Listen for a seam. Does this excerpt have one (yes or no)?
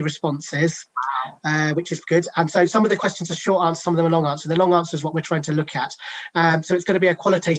no